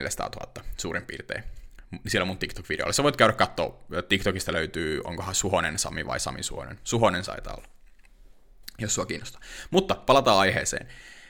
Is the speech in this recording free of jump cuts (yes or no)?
no